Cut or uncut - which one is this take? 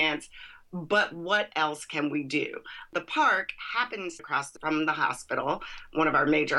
cut